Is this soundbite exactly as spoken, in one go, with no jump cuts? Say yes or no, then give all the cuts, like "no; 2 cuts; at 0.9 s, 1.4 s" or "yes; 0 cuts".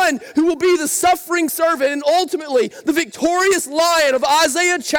yes; 0 cuts